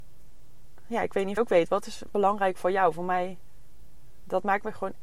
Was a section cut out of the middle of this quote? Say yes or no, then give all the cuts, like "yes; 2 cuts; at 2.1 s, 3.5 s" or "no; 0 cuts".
yes; 2 cuts; at 1.4 s, 2.1 s